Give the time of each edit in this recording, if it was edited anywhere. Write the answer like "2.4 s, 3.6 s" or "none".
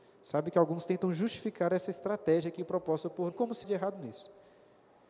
3.3 s, 3.6 s